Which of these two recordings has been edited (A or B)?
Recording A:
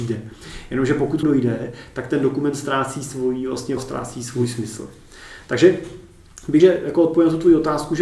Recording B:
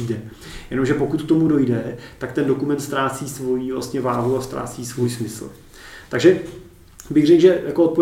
A